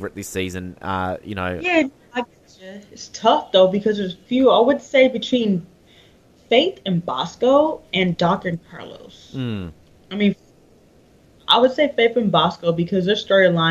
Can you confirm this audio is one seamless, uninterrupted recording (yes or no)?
yes